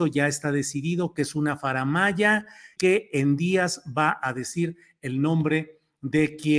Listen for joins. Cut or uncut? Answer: cut